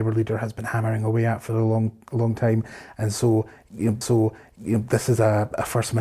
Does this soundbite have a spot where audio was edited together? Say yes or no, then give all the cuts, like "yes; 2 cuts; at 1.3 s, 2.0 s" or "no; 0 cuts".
yes; 1 cut; at 4.0 s